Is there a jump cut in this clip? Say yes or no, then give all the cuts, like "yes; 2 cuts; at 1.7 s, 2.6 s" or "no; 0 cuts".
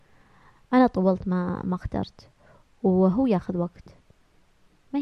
no; 0 cuts